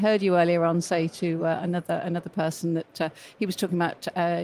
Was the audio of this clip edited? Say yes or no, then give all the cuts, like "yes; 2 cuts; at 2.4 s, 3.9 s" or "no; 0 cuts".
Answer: no; 0 cuts